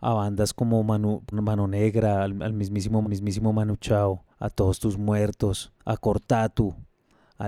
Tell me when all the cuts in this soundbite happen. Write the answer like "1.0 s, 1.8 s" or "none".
1.3 s, 3.0 s, 4.3 s, 5.7 s